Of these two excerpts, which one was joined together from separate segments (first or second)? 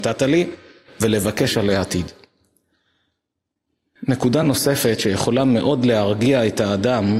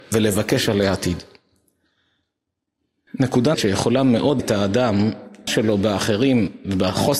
second